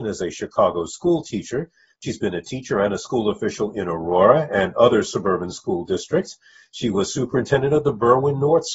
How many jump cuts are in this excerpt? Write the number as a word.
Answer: zero